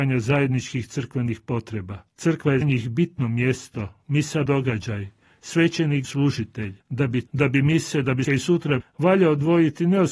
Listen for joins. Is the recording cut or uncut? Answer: cut